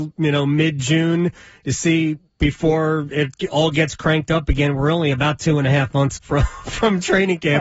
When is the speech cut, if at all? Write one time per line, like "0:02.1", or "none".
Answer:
0:06.2